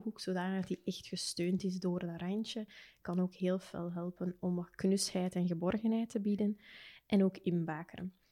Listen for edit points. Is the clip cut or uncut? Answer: uncut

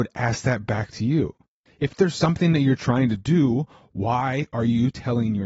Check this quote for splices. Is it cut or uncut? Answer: uncut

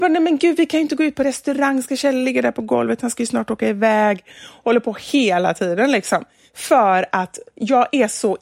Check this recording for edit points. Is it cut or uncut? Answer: uncut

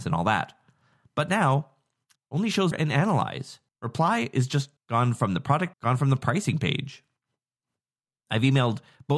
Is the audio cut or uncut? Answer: cut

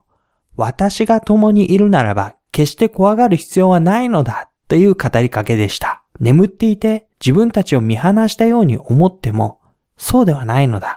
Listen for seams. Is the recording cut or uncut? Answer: cut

